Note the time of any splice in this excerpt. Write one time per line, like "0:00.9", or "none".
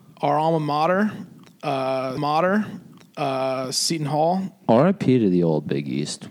0:02.2